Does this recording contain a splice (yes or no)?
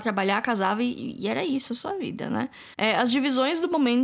yes